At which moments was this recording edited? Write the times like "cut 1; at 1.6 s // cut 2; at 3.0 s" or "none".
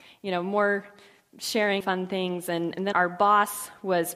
cut 1; at 1.8 s // cut 2; at 2.9 s